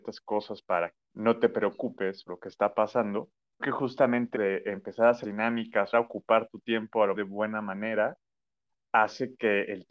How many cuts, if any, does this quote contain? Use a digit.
7